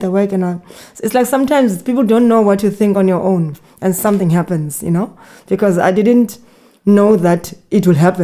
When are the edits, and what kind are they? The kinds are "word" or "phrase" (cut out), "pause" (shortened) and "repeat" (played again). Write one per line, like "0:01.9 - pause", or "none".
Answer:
none